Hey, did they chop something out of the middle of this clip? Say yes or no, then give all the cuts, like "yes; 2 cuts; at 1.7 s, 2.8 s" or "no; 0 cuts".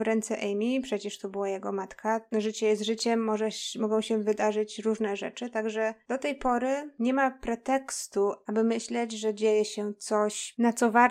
no; 0 cuts